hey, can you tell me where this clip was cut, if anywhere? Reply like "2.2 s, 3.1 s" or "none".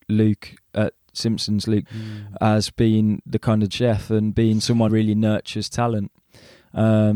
1.9 s, 3.7 s, 4.9 s